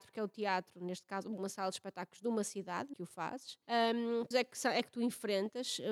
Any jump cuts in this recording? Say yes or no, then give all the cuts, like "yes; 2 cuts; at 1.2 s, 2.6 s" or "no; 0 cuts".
yes; 3 cuts; at 2.9 s, 3.6 s, 4.3 s